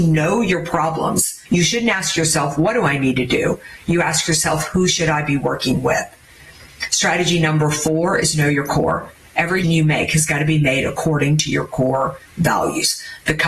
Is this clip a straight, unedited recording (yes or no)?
no